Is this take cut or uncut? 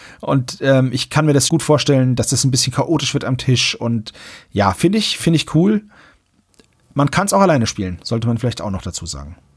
cut